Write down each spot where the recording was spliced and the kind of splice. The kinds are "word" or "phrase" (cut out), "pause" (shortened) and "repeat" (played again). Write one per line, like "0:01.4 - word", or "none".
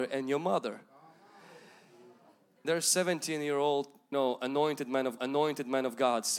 0:02.6 - word
0:04.1 - word
0:05.2 - repeat